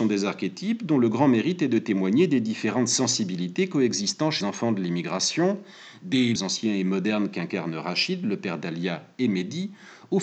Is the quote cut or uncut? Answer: cut